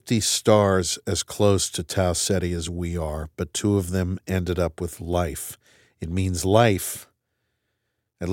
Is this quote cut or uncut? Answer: uncut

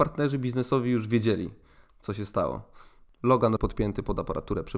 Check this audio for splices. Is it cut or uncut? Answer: cut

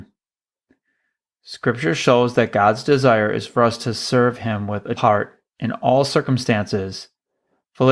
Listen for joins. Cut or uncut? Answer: cut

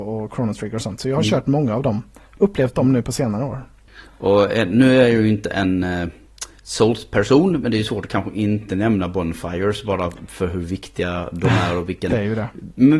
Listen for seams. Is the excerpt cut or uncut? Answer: uncut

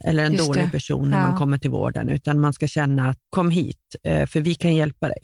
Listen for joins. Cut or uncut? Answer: cut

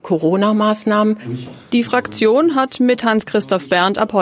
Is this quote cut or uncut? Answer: uncut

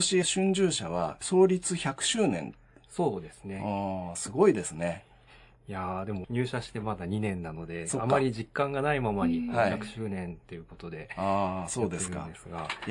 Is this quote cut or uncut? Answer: uncut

